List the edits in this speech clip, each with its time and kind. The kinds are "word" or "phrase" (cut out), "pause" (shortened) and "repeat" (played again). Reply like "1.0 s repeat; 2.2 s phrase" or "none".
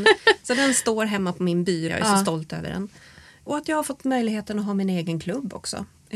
1.9 s word

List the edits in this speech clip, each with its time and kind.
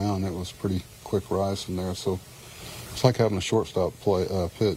none

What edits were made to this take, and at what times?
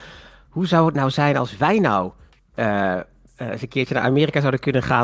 none

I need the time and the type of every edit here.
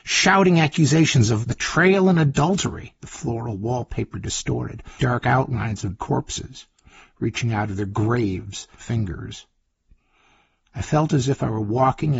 1.4 s word; 3.0 s pause; 5.0 s word; 6.0 s word; 8.8 s phrase

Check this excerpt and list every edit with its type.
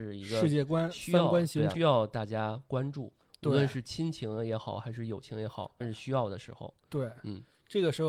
1.7 s word; 5.8 s word

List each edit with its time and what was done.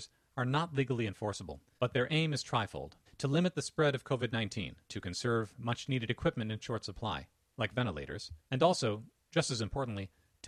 1.7 s pause; 3.1 s pause; 4.8 s pause; 8.4 s pause

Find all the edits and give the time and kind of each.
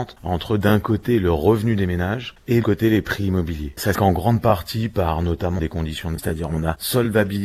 2.6 s word; 3.9 s word; 5.6 s word; 6.2 s word

